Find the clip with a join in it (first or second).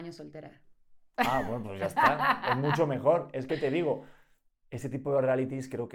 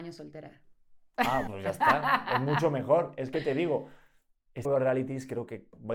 second